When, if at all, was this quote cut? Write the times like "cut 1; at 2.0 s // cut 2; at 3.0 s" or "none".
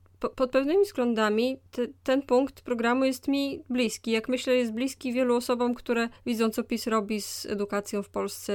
cut 1; at 6.2 s